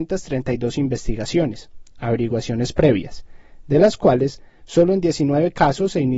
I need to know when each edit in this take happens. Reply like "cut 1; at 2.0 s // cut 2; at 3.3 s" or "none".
none